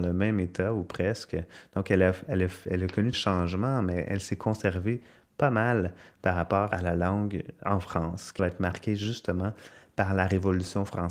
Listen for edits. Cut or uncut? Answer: cut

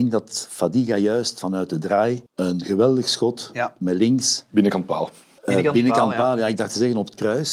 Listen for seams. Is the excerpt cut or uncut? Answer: cut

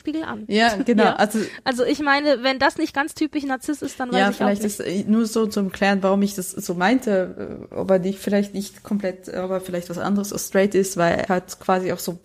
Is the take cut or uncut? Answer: cut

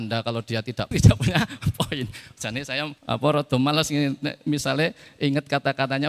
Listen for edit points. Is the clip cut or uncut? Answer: cut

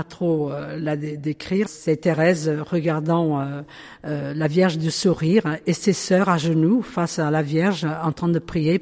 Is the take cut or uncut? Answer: cut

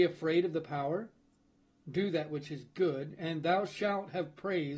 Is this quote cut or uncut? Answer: uncut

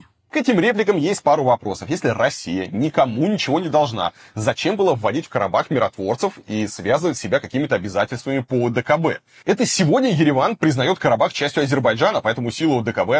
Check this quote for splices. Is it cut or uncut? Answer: uncut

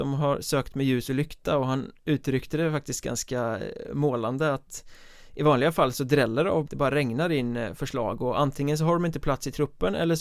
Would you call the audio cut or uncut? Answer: cut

